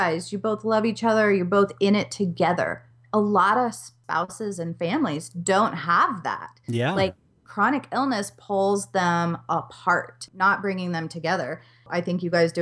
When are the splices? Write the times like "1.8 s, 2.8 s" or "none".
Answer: none